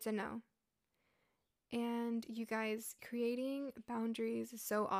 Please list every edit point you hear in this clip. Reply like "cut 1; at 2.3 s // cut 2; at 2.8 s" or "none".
none